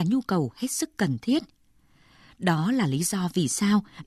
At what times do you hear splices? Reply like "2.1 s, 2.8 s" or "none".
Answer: none